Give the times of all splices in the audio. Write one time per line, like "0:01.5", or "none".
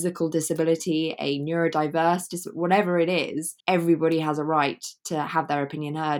0:03.6